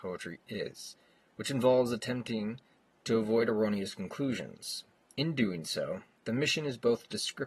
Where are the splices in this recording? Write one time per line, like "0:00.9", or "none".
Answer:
none